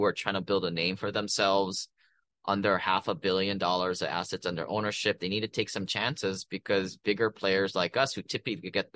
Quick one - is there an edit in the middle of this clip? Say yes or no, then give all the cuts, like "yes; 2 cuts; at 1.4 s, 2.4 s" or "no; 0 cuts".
no; 0 cuts